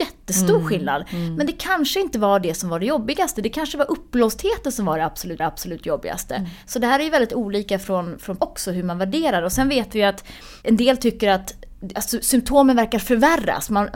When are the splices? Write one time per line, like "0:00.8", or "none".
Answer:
0:05.4
0:08.4